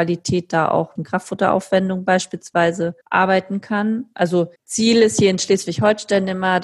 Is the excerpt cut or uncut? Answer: cut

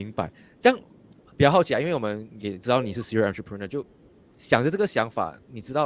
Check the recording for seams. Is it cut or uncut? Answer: uncut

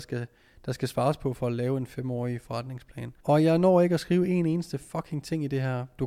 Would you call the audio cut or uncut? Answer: cut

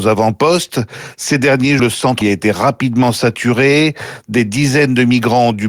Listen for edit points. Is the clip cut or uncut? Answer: cut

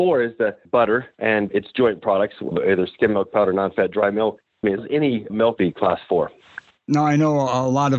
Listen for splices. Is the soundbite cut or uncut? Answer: cut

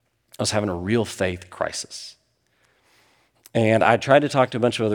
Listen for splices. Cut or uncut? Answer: uncut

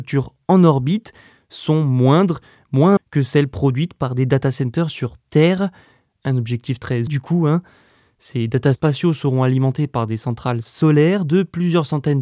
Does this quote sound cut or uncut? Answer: cut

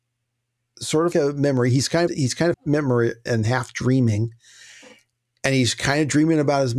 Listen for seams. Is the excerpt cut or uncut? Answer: cut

